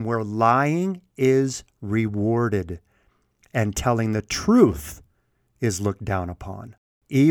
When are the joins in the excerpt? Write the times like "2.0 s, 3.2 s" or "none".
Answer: none